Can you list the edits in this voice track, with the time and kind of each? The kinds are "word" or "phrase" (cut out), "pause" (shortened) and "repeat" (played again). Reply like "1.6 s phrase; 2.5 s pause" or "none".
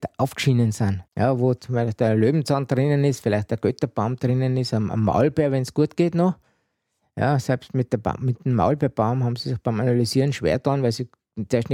1.1 s pause